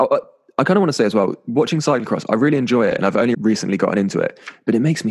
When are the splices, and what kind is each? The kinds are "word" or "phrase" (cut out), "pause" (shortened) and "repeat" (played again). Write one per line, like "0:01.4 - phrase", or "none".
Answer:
0:03.3 - word

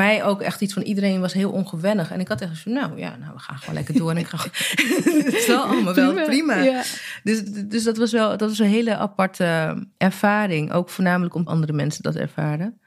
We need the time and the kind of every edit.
0:07.5 - word
0:09.9 - pause
0:11.5 - phrase

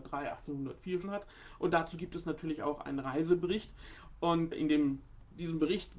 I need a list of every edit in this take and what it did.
0:01.0 - word
0:04.5 - word

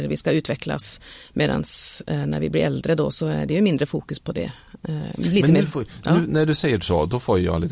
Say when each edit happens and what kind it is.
none

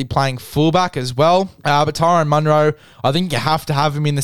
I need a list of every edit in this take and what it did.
0:01.6 - pause

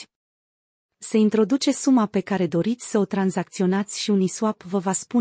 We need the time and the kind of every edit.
none

